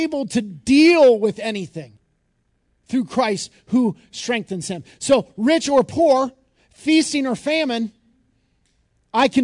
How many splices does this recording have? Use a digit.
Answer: 0